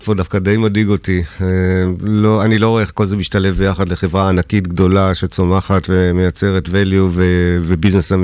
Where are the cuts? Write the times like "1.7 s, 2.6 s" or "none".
none